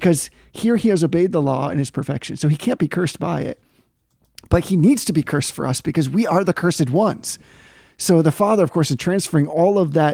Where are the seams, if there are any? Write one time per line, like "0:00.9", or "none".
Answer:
none